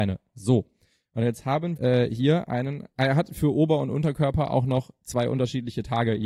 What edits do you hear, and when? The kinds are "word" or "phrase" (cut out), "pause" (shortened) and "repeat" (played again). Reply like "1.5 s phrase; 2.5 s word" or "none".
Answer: 1.8 s word